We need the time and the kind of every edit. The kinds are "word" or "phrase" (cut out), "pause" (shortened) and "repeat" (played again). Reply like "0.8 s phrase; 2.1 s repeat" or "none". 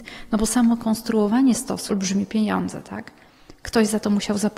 1.9 s phrase